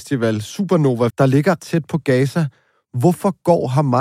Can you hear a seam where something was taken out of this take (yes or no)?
yes